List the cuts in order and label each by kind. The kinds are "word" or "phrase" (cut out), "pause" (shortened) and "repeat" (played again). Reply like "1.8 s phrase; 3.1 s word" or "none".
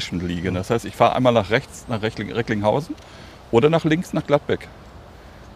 none